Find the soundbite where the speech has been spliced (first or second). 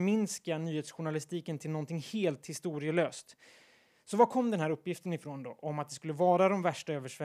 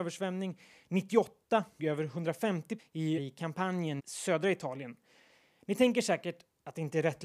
second